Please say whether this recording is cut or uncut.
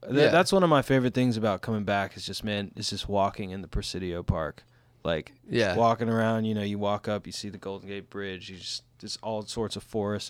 uncut